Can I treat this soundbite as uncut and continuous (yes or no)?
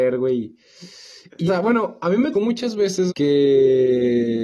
no